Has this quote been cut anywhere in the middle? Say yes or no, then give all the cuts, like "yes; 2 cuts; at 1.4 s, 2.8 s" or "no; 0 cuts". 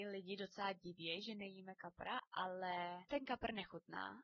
yes; 1 cut; at 3.1 s